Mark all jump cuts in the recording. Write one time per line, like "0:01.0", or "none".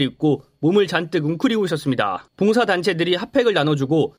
0:02.3